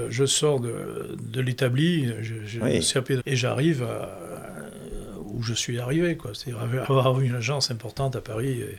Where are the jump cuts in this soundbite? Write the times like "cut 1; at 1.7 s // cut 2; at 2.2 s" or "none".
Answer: cut 1; at 3.2 s